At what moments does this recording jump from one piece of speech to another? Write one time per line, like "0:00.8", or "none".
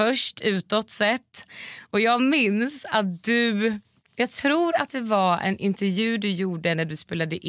none